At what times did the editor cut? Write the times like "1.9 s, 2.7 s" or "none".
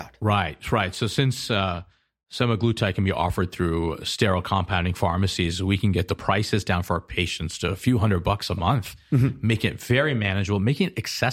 none